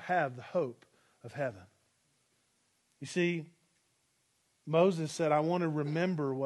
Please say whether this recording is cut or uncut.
uncut